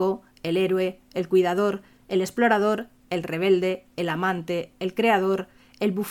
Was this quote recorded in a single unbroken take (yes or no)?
yes